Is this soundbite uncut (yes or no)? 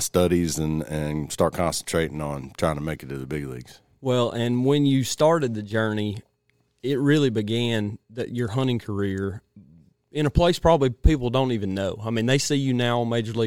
no